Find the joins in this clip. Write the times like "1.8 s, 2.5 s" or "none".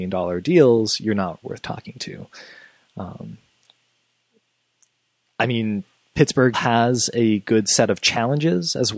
1.4 s, 6.5 s